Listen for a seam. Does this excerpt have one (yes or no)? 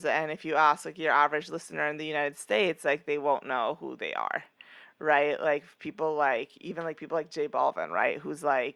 no